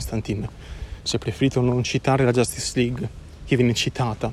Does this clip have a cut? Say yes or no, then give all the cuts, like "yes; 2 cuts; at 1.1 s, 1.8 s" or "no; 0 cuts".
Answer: no; 0 cuts